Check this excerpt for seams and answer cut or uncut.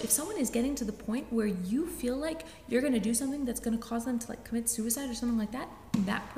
uncut